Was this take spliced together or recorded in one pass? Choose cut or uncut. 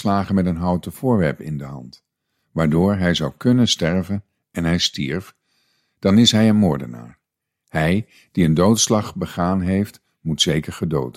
uncut